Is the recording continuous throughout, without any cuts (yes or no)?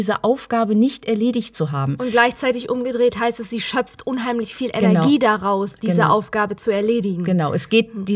yes